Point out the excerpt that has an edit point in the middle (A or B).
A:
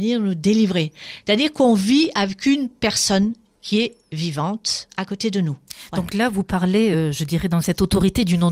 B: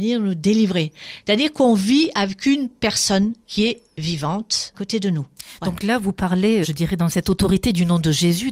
B